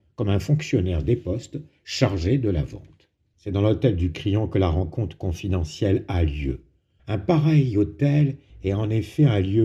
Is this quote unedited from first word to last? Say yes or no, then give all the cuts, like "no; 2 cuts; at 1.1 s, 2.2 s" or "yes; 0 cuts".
yes; 0 cuts